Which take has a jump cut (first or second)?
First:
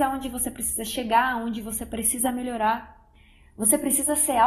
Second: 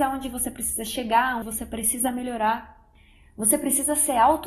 second